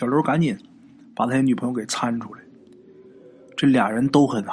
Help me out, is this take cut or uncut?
uncut